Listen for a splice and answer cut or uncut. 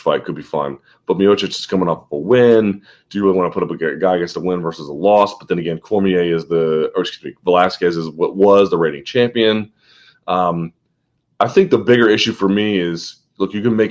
uncut